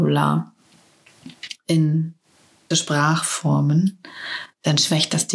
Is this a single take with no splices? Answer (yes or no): no